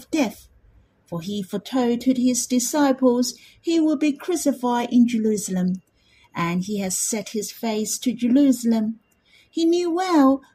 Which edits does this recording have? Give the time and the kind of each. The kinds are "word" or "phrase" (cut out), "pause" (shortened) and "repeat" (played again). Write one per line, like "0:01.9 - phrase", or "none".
none